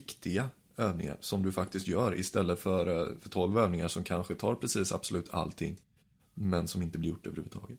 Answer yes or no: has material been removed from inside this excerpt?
no